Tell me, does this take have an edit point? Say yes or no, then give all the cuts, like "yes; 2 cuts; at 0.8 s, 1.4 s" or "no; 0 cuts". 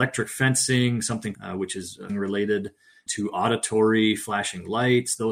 yes; 3 cuts; at 1.3 s, 2.1 s, 3.1 s